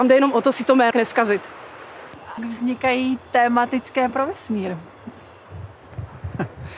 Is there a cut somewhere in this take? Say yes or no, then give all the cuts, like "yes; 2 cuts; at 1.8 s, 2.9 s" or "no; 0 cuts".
yes; 3 cuts; at 0.9 s, 2.4 s, 4.1 s